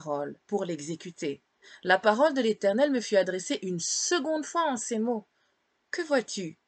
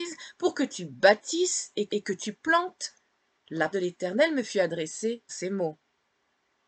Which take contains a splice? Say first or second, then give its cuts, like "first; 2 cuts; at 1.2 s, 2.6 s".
second; 3 cuts; at 1.9 s, 3.7 s, 5.3 s